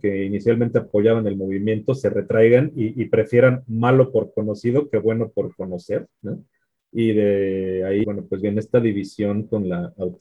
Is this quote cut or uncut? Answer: cut